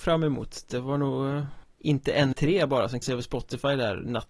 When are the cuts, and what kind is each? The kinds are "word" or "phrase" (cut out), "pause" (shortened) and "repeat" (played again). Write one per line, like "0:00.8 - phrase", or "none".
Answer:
0:01.6 - pause
0:02.3 - word
0:03.0 - word